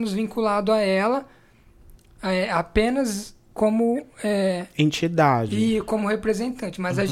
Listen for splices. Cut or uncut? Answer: uncut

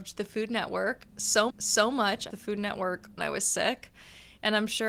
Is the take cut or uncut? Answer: cut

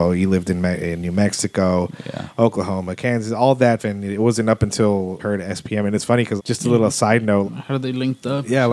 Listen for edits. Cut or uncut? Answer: cut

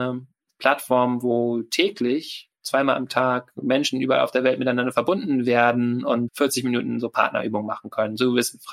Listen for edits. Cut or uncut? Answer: cut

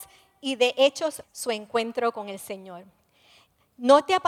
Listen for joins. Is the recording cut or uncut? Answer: cut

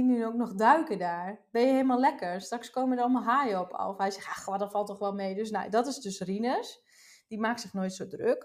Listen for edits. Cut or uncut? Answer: uncut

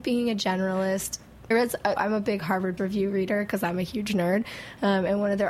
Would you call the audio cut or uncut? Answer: cut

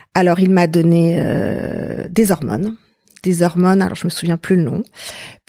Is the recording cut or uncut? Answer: uncut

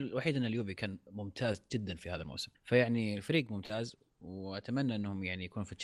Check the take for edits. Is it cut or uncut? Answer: cut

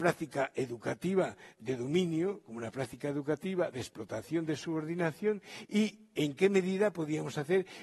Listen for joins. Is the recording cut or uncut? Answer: uncut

